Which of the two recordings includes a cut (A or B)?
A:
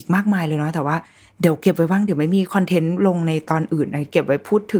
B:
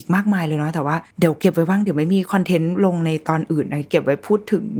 B